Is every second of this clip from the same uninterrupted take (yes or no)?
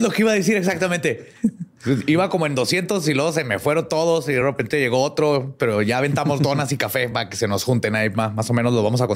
yes